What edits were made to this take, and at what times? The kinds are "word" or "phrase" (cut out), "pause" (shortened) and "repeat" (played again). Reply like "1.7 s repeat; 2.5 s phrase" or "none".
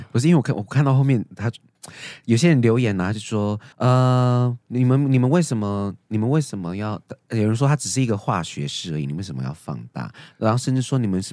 3.7 s pause